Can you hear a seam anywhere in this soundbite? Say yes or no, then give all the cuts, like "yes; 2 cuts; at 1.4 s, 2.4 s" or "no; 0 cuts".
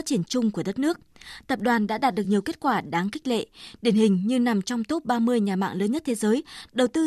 no; 0 cuts